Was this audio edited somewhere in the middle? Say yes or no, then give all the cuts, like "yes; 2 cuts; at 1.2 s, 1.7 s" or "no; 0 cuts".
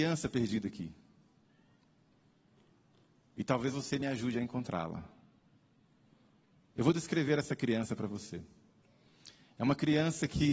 no; 0 cuts